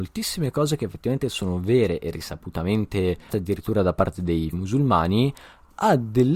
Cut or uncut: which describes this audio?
cut